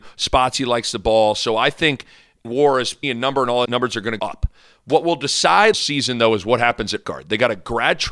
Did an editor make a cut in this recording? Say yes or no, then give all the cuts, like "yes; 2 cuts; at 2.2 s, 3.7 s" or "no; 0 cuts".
yes; 6 cuts; at 2.4 s, 3.0 s, 3.6 s, 4.2 s, 5.7 s, 7.0 s